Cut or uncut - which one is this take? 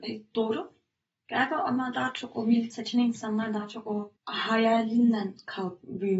cut